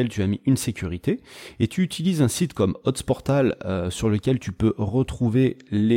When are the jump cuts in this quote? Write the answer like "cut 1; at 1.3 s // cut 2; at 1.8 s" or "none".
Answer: none